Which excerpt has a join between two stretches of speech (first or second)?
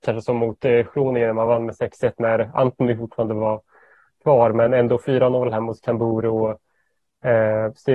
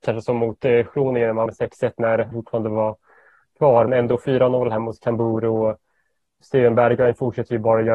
second